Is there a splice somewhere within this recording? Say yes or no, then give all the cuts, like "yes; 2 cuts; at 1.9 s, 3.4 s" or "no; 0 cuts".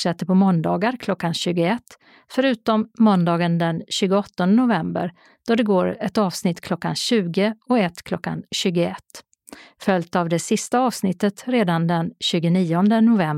no; 0 cuts